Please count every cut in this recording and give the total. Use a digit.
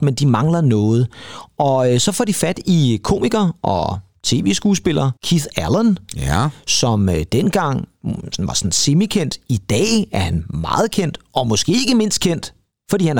1